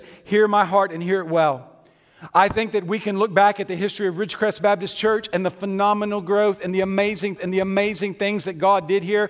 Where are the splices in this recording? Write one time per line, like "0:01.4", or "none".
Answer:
0:07.4